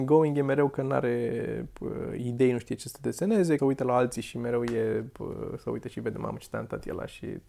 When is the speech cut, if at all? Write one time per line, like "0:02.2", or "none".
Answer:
0:03.6